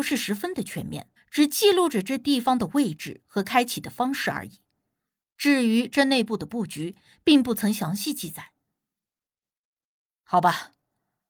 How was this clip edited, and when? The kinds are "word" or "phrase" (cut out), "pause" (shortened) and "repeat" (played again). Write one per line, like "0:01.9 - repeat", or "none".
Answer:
0:01.2 - pause